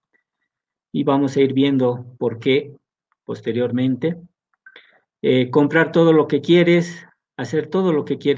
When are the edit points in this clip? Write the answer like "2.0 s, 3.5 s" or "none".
none